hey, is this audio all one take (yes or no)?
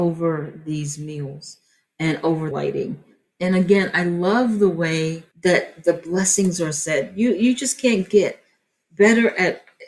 no